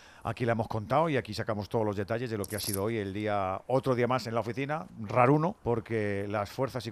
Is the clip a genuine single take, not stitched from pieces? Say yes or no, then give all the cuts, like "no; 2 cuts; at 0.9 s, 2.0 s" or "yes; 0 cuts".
no; 2 cuts; at 4.9 s, 5.6 s